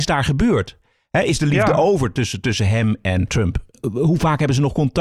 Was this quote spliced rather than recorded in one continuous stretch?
no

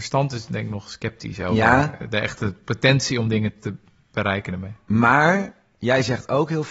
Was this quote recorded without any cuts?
yes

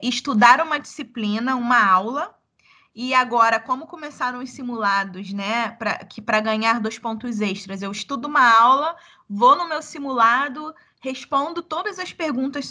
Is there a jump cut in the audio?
no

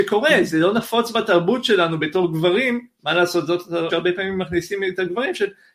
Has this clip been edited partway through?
yes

